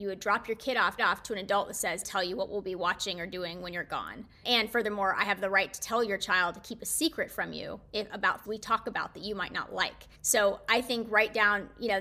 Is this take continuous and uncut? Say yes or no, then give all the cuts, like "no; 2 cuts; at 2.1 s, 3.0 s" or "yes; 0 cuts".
no; 5 cuts; at 1.0 s, 2.0 s, 4.4 s, 8.4 s, 10.1 s